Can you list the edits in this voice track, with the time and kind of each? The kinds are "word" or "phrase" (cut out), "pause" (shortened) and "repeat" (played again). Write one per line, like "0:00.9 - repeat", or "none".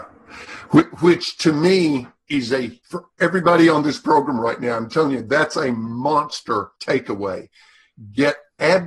0:02.8 - pause
0:06.8 - pause